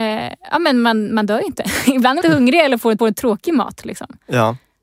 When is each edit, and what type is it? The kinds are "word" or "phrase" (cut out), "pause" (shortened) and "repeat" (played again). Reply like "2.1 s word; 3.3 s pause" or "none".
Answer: 2.2 s phrase; 3.0 s repeat